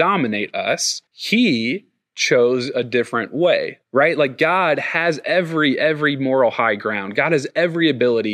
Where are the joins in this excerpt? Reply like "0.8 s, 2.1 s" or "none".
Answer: 1.1 s, 3.8 s